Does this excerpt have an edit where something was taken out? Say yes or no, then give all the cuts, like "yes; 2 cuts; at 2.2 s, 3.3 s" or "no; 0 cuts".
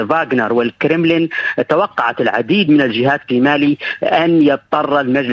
no; 0 cuts